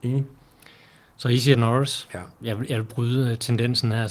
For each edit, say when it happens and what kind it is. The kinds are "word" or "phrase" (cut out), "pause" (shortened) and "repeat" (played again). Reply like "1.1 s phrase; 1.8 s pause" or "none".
1.5 s word